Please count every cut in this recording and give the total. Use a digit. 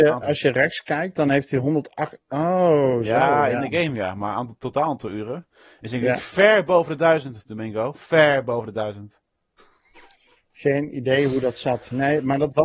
0